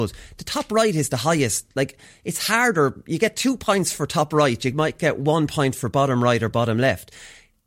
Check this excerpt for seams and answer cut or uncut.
uncut